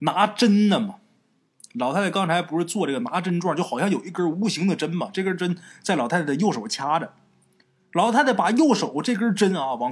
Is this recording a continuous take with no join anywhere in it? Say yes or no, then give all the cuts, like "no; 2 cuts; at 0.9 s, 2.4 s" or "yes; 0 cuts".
yes; 0 cuts